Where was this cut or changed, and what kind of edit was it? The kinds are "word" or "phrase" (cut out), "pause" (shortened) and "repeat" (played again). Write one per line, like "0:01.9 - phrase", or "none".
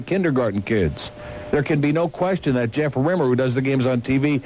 none